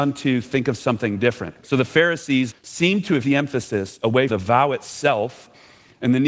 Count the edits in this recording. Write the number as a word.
four